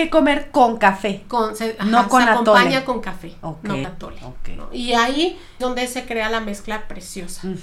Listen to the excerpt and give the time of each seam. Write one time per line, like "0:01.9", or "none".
0:03.8
0:05.6